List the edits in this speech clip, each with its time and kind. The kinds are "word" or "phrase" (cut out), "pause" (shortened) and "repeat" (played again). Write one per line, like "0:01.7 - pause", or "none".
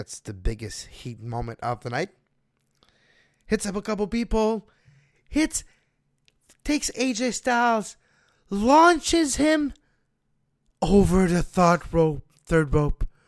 none